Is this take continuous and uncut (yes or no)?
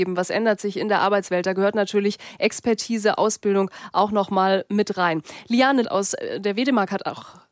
no